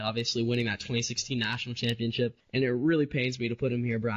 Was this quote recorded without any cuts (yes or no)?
no